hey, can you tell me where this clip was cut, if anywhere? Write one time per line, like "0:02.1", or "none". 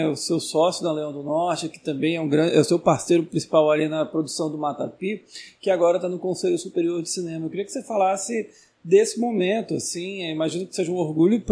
none